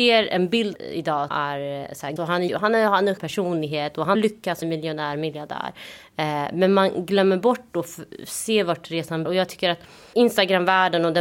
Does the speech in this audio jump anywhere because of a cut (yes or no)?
yes